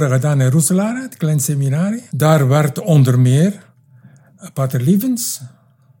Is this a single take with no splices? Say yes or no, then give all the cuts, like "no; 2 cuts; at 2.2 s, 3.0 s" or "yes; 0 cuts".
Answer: no; 1 cut; at 2.1 s